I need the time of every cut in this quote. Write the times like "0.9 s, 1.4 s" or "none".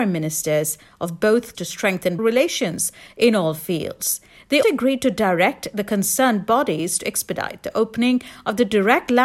1.5 s, 2.2 s, 4.6 s